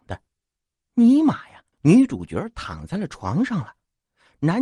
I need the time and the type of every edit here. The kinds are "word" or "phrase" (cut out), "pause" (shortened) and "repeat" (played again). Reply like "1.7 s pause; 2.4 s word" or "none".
1.7 s pause